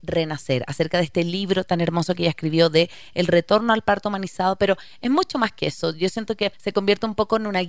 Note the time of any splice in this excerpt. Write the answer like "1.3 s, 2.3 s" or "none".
6.5 s

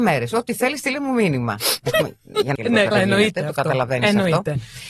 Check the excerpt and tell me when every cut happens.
2.6 s, 2.9 s

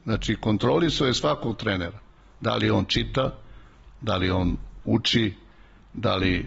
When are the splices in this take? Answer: none

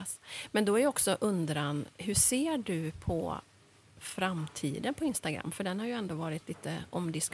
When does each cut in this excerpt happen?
none

